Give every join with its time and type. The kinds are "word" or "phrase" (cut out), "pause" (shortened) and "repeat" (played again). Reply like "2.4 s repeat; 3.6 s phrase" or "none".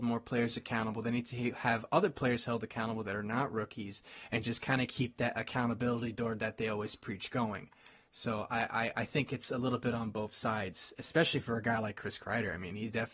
none